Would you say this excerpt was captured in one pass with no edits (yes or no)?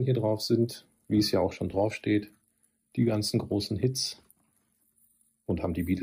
yes